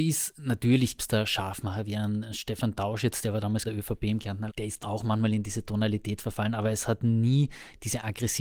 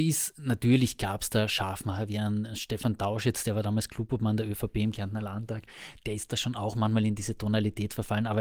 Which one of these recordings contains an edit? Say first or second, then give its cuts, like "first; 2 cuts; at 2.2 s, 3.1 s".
first; 4 cuts; at 1.0 s, 3.6 s, 4.5 s, 4.8 s